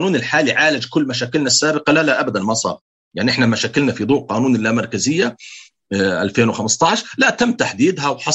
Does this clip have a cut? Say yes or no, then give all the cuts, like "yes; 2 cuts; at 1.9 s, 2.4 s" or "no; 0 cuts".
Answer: no; 0 cuts